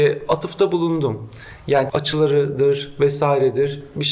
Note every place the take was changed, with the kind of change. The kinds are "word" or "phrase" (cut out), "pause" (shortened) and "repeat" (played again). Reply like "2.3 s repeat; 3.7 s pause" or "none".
1.9 s word